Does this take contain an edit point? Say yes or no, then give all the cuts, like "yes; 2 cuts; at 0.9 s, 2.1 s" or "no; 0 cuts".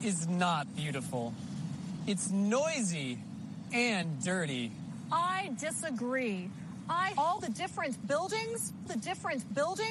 yes; 2 cuts; at 7.1 s, 8.9 s